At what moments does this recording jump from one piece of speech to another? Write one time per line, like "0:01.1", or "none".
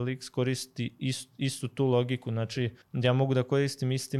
0:02.8